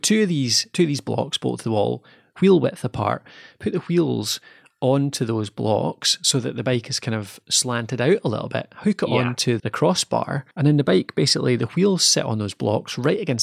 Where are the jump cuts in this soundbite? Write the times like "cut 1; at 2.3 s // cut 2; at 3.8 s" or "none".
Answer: cut 1; at 9.6 s // cut 2; at 10.5 s